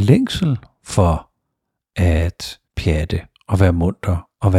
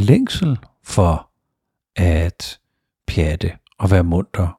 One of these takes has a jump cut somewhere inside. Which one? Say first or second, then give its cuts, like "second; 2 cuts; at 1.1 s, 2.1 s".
first; 1 cut; at 2.7 s